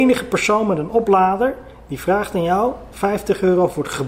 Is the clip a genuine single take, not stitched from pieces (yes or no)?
yes